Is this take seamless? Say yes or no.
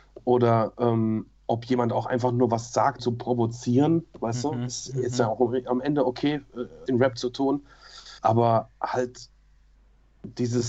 no